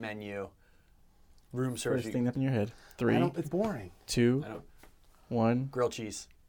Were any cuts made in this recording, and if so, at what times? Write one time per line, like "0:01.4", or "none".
0:02.3
0:03.4